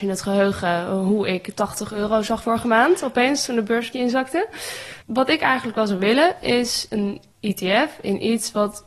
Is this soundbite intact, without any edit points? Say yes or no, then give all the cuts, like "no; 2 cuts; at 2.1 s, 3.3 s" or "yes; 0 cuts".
no; 4 cuts; at 2.4 s, 3.9 s, 5.0 s, 7.3 s